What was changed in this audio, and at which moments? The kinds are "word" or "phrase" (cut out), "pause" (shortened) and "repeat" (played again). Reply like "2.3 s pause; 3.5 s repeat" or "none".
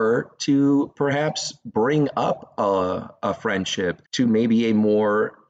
4.1 s pause